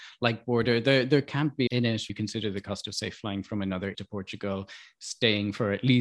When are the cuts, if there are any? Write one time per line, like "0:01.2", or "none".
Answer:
0:01.7
0:02.1
0:03.9